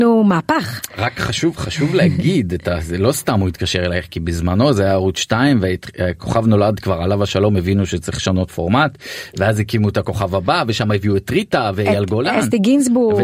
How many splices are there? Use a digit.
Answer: 0